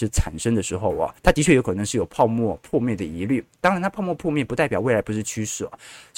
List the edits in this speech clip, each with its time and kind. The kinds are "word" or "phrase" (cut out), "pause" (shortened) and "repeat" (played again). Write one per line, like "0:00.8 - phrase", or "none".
0:01.2 - pause